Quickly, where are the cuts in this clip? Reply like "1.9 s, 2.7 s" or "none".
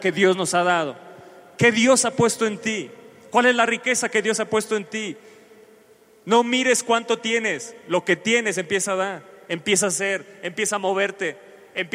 none